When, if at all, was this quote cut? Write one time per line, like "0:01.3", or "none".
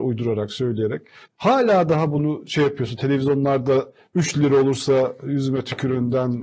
0:01.2

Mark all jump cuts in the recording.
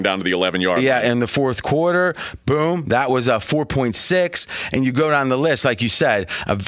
none

